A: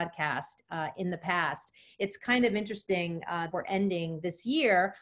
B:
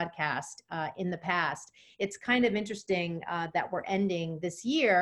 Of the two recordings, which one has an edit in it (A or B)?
A